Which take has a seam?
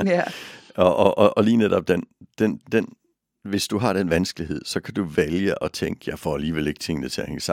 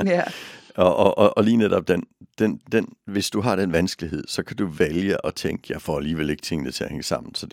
second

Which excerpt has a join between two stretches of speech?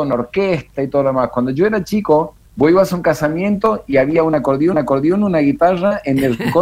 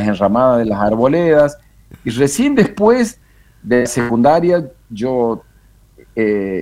first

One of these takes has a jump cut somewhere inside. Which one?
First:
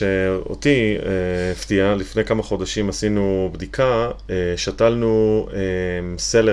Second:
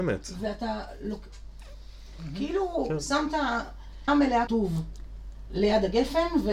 second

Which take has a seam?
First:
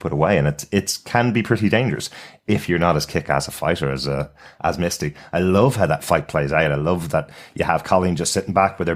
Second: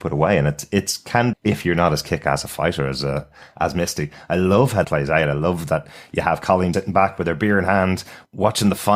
second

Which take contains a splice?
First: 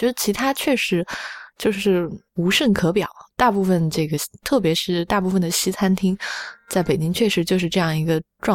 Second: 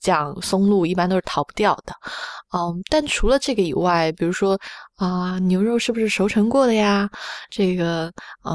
first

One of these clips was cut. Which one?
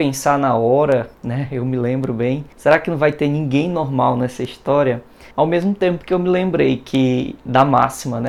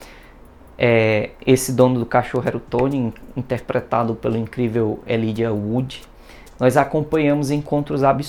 first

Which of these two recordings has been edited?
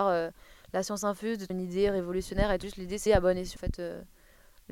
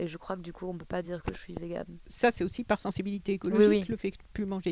first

